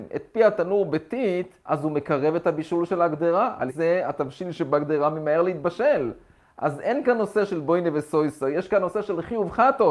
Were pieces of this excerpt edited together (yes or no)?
yes